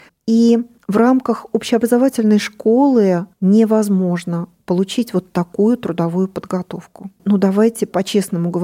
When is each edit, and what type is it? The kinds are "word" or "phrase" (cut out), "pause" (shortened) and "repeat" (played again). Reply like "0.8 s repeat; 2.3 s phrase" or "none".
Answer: 3.3 s pause